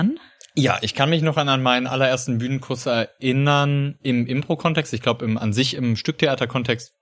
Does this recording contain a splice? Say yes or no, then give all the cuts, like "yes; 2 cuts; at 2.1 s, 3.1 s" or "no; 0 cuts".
no; 0 cuts